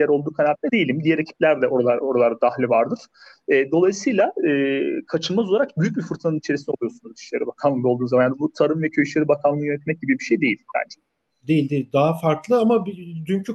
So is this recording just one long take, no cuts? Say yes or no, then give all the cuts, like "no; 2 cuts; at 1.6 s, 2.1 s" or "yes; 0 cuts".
yes; 0 cuts